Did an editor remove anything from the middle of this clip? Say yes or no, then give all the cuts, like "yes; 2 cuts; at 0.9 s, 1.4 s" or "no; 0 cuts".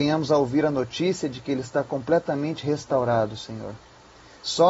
no; 0 cuts